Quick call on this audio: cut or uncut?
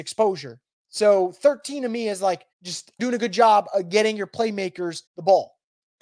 cut